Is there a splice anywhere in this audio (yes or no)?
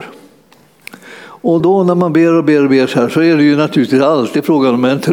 yes